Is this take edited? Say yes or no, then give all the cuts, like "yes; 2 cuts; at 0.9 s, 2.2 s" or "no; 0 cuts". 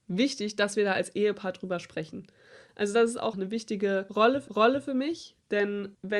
yes; 2 cuts; at 3.3 s, 4.5 s